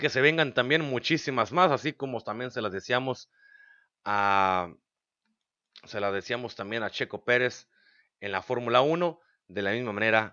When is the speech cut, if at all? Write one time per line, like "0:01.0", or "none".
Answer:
none